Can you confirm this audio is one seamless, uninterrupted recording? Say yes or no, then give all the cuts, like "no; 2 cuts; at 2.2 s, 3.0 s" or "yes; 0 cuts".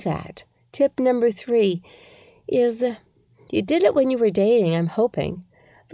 yes; 0 cuts